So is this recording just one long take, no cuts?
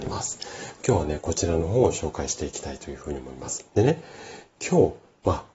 no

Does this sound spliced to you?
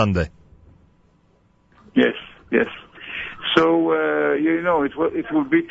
no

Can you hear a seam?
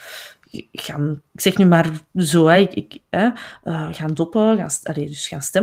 no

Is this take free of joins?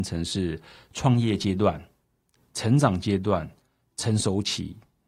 yes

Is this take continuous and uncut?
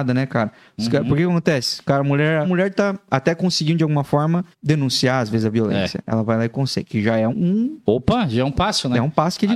no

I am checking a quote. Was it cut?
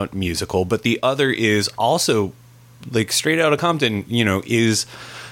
no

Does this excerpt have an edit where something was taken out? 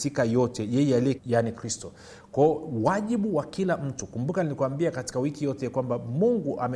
yes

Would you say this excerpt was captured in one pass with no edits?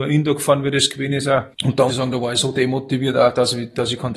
no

